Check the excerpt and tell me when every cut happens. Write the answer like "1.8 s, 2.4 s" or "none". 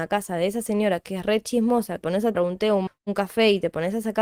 2.0 s, 2.3 s, 2.9 s